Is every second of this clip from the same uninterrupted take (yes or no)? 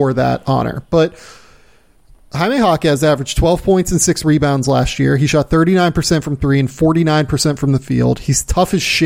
yes